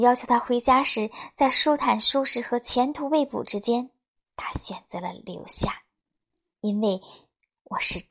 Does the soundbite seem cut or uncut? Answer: uncut